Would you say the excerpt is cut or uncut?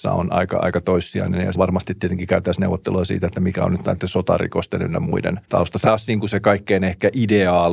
cut